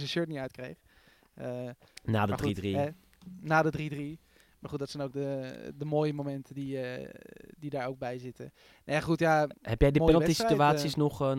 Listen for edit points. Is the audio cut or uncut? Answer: uncut